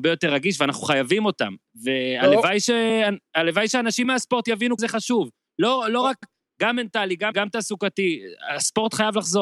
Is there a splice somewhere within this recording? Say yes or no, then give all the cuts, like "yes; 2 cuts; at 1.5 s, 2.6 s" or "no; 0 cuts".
yes; 4 cuts; at 4.0 s, 4.8 s, 6.2 s, 7.3 s